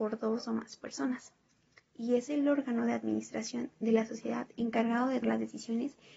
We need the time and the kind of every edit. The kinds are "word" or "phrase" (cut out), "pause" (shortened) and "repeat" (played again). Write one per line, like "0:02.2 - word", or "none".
0:05.2 - word